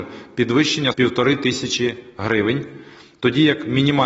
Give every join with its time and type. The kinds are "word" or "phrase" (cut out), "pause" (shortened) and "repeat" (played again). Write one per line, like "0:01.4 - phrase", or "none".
0:00.9 - word

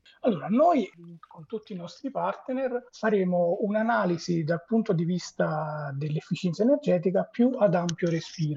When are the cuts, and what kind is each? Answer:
0:02.9 - pause

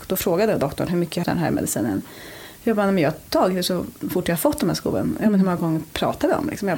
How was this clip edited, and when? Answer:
0:01.2 - phrase

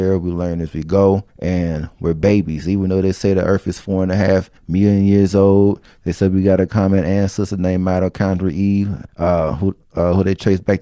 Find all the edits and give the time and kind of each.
0:01.3 - pause
0:04.6 - pause
0:09.1 - pause

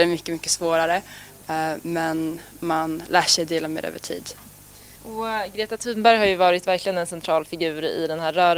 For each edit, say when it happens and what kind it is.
0:05.0 - pause

